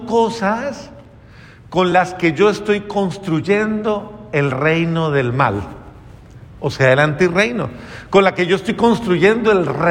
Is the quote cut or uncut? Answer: uncut